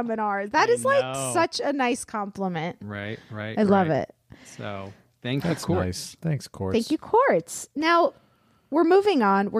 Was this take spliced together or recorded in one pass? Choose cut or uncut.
uncut